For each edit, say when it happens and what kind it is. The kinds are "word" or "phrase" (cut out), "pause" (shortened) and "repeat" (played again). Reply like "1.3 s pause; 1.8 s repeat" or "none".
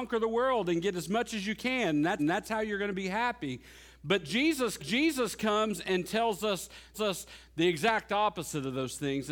2.2 s repeat; 4.8 s repeat; 6.9 s repeat